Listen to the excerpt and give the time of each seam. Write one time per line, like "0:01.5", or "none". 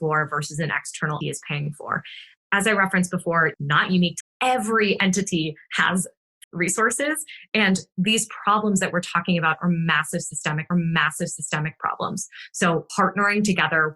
0:01.2
0:02.4
0:03.5
0:04.2
0:06.4
0:10.7
0:12.9